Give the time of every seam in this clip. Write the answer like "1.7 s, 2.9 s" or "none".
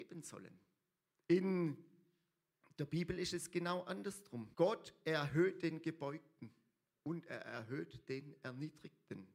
1.1 s, 4.5 s